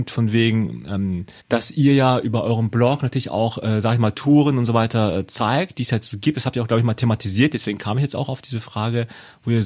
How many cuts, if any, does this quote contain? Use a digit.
1